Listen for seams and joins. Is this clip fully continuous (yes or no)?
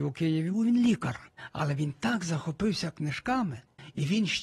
yes